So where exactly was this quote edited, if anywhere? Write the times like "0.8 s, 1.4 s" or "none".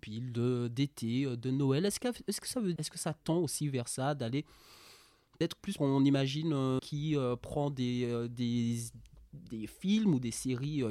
2.8 s, 5.8 s, 6.8 s